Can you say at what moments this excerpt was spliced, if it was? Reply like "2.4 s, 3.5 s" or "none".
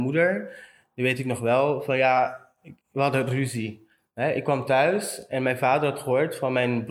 2.8 s